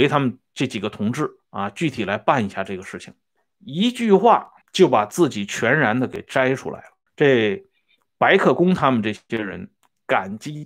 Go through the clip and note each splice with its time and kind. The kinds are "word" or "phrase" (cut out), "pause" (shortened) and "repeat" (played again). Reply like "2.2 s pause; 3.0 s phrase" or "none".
1.4 s pause; 3.4 s pause; 4.6 s pause; 7.1 s pause